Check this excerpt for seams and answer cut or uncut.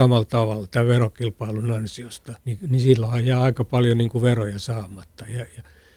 cut